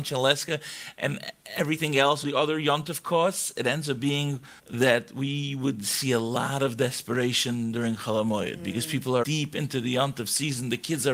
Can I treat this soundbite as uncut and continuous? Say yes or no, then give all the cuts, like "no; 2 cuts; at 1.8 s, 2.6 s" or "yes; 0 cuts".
no; 3 cuts; at 2.2 s, 4.6 s, 9.2 s